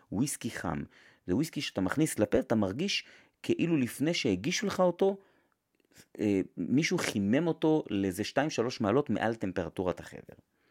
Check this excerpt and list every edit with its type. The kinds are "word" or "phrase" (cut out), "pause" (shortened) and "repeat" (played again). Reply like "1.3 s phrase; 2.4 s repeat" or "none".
none